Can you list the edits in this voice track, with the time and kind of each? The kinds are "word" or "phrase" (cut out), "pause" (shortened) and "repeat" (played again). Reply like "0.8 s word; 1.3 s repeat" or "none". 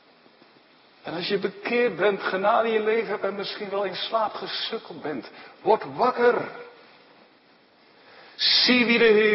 none